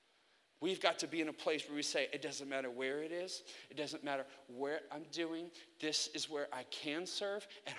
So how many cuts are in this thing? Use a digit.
0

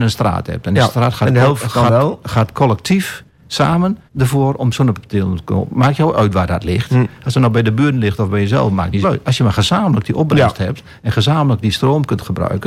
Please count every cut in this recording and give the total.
2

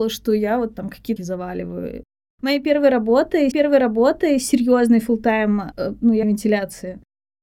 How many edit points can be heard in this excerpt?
4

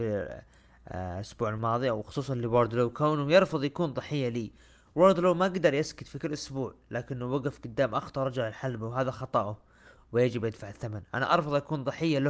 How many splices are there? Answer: 0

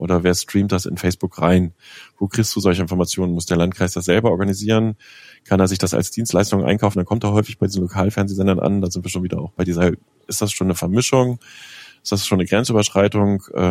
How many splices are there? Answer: 0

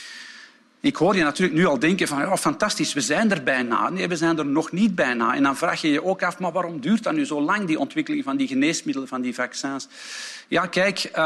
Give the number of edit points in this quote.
0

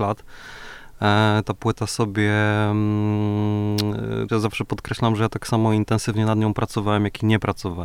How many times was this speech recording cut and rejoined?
1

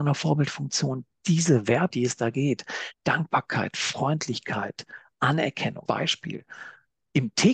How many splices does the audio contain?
2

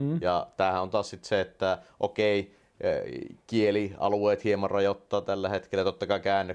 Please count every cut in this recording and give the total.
1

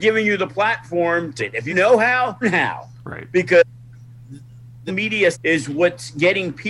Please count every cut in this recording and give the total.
5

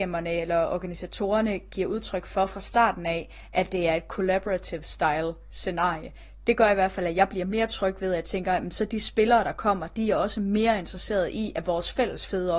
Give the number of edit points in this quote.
0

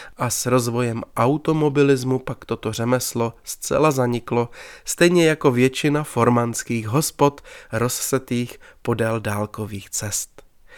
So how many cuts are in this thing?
0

